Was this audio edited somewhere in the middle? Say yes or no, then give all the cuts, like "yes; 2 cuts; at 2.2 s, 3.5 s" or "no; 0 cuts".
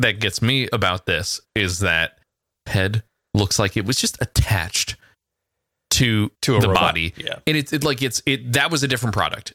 yes; 1 cut; at 2.7 s